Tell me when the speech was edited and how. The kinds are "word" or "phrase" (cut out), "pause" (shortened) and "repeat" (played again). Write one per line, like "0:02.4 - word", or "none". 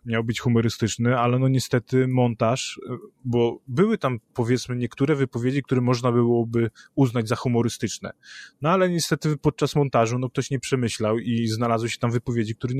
none